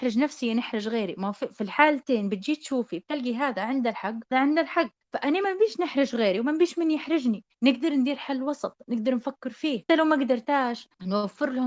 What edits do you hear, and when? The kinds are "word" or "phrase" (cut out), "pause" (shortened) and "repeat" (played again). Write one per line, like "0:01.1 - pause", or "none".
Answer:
0:04.3 - word
0:09.9 - word